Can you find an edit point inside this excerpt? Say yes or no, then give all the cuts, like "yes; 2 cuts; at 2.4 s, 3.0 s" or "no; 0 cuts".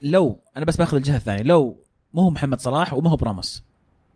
no; 0 cuts